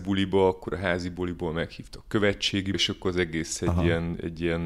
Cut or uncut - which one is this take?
cut